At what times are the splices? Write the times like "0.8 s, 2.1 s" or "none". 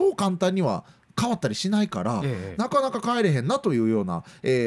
none